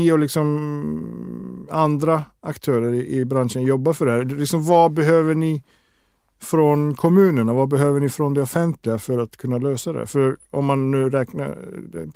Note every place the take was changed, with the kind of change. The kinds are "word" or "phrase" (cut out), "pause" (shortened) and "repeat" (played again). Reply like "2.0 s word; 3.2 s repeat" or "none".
none